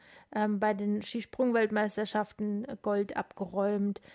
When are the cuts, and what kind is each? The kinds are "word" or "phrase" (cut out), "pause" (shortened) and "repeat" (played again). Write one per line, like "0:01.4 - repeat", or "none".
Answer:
none